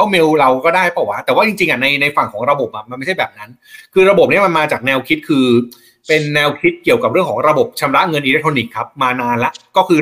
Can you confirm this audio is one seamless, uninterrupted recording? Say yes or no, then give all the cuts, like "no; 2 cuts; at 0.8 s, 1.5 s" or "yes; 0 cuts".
yes; 0 cuts